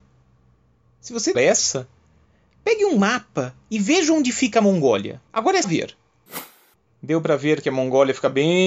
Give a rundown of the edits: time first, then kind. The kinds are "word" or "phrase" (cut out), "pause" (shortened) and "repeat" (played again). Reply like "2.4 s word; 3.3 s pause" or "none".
1.3 s phrase; 5.3 s pause; 5.6 s phrase